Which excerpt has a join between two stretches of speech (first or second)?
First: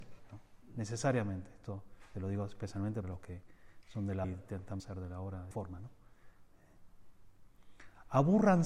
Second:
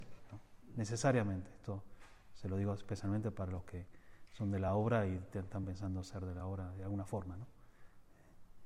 first